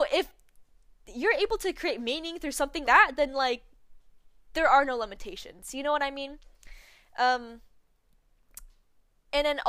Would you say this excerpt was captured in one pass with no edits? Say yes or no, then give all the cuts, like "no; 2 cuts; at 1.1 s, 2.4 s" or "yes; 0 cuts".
no; 1 cut; at 2.8 s